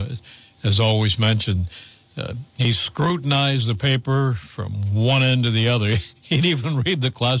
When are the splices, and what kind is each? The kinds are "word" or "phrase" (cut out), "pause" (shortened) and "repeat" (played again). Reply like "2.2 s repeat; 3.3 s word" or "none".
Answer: none